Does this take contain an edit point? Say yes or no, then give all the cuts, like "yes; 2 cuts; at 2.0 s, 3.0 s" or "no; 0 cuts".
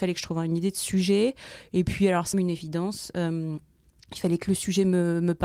yes; 1 cut; at 2.3 s